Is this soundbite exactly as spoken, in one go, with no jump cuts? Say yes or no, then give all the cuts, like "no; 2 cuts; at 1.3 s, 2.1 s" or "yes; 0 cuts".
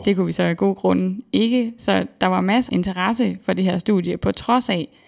no; 1 cut; at 2.7 s